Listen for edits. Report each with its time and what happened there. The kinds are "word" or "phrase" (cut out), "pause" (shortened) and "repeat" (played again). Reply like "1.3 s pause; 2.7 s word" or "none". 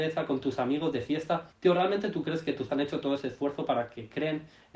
1.5 s pause; 2.7 s word